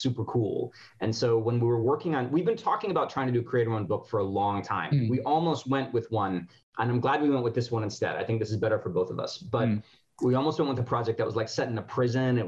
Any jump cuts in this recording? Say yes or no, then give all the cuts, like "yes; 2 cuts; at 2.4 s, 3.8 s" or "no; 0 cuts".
no; 0 cuts